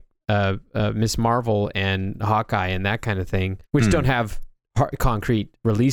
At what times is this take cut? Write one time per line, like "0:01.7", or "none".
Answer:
0:03.6

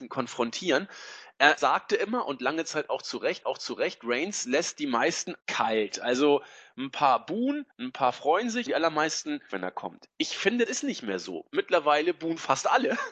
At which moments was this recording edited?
0:01.6
0:03.4
0:05.4
0:07.7
0:08.7
0:09.5
0:10.7

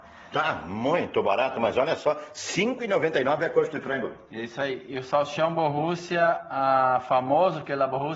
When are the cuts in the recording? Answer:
none

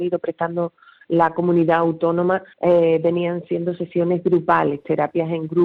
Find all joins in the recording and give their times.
0:02.5

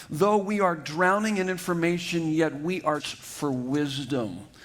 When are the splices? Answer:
0:03.0

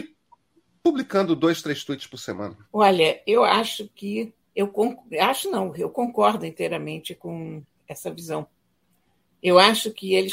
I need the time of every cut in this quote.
0:02.6
0:04.4

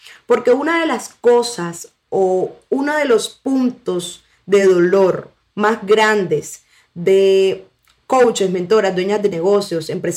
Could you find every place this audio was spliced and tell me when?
none

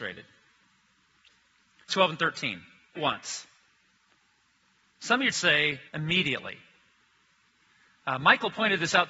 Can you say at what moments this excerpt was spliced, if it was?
0:01.9
0:02.9
0:05.3
0:05.9

